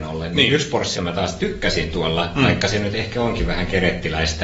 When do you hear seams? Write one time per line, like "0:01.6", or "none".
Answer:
0:00.9

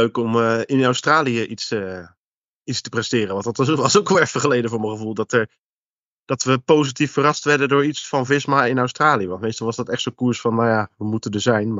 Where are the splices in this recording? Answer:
none

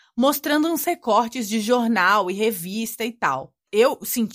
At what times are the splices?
none

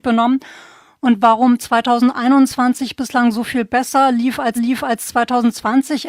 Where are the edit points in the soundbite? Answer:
0:04.6

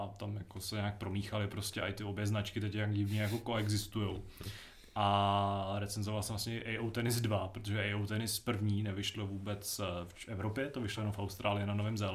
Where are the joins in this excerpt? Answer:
none

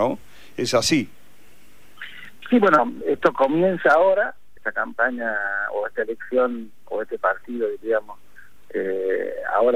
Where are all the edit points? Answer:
0:03.0
0:04.6

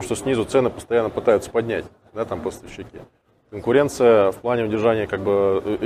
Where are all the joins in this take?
none

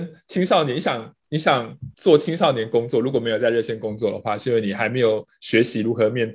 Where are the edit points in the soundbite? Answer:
0:01.9

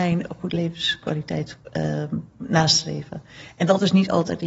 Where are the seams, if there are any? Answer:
none

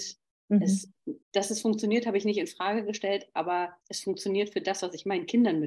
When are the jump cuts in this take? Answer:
0:01.2
0:03.8

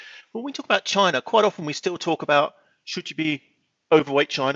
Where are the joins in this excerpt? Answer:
none

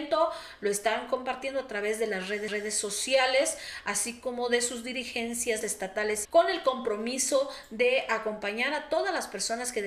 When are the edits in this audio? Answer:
0:02.5
0:05.6
0:06.2

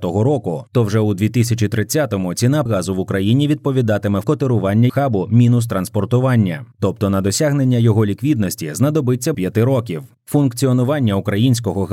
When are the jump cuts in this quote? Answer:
0:02.7
0:04.2
0:04.9
0:09.3

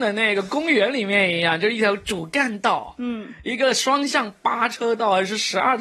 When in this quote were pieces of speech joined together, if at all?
none

